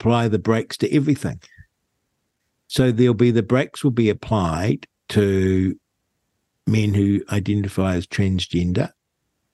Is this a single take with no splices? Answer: yes; 0 cuts

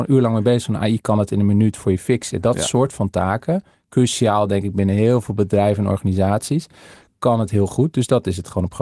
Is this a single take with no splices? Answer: yes; 0 cuts

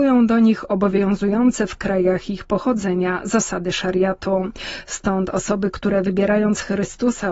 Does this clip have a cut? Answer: no; 0 cuts

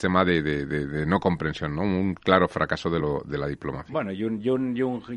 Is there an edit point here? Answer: no; 0 cuts

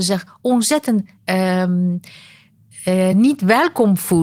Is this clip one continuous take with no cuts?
yes; 0 cuts

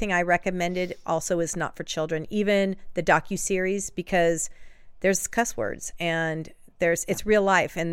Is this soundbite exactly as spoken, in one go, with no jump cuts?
yes; 0 cuts

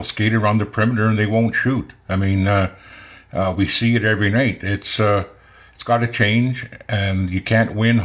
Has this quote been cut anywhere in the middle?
no; 0 cuts

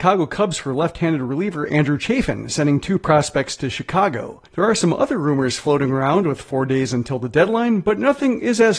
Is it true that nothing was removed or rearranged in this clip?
no; 1 cut; at 4.5 s

